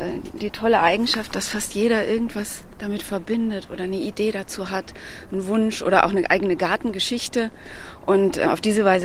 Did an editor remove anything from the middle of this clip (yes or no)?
no